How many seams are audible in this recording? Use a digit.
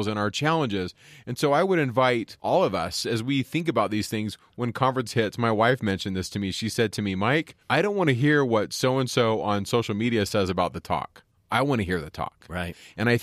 1